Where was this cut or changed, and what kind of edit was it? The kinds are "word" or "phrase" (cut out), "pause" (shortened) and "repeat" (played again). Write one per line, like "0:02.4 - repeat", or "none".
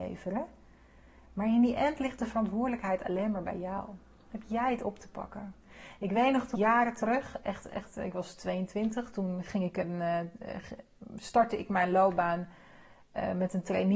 0:06.5 - word